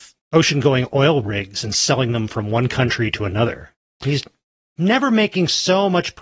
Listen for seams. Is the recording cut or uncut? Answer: uncut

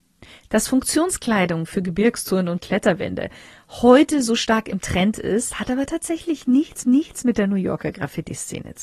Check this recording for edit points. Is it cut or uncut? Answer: cut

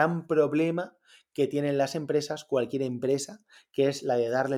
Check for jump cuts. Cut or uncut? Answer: uncut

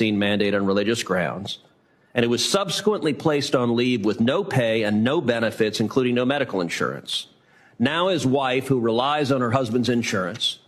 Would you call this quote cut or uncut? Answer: uncut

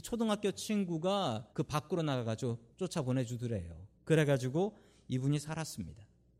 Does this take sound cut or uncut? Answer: cut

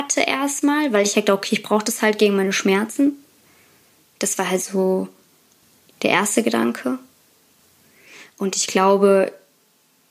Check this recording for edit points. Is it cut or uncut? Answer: uncut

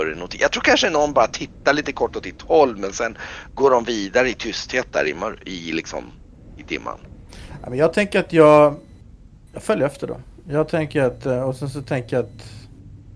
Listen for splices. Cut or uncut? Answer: uncut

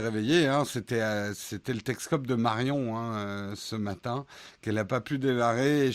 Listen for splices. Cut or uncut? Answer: uncut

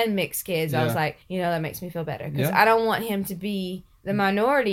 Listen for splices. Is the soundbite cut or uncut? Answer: cut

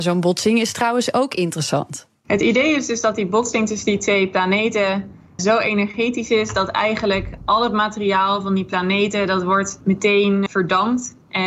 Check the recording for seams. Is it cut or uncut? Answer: cut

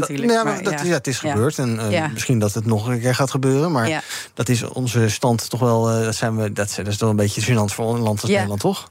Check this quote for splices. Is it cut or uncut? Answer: uncut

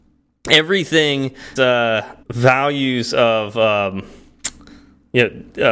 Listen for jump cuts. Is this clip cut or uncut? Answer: cut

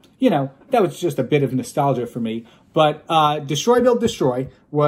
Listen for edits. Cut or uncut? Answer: uncut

